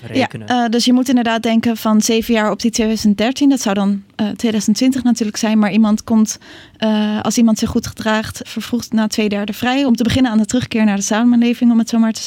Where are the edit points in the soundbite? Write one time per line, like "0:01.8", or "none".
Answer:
0:08.4